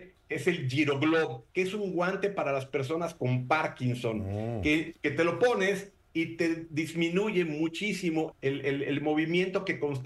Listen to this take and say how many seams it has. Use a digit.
3